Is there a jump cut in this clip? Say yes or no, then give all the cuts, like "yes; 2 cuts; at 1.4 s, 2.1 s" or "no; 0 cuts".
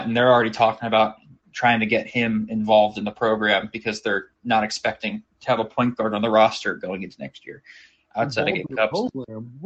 no; 0 cuts